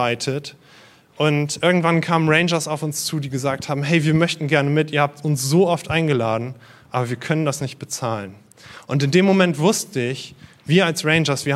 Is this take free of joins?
yes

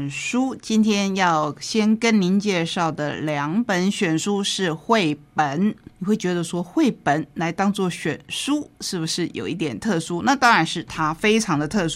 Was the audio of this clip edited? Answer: no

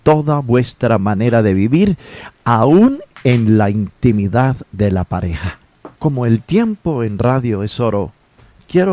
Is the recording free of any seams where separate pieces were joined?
no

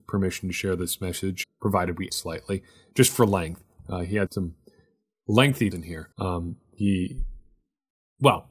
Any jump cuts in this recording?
yes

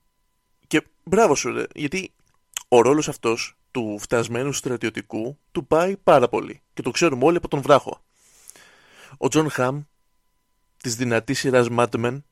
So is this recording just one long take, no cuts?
yes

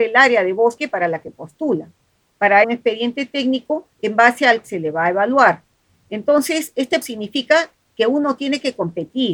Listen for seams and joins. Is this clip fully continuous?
no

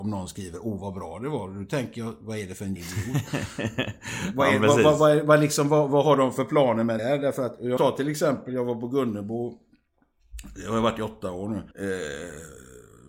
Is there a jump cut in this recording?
yes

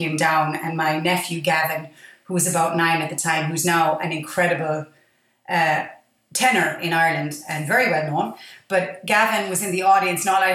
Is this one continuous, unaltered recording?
yes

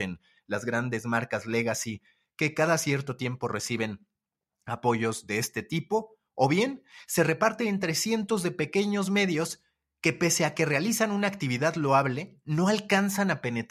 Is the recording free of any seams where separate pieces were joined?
yes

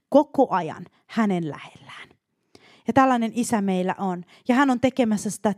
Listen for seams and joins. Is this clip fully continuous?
yes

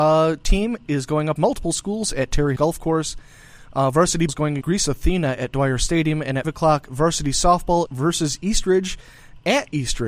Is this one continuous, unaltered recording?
no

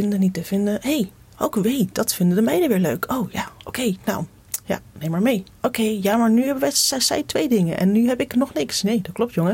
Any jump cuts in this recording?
no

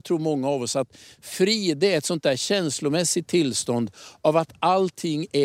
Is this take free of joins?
yes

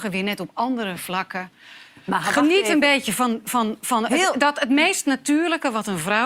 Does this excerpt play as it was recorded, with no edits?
yes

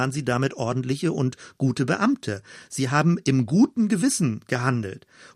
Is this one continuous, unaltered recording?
yes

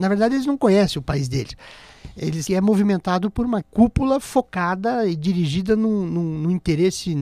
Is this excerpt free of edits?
no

